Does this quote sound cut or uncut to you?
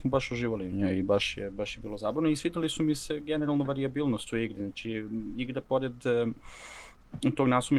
uncut